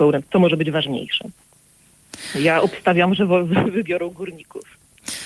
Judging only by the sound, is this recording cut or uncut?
uncut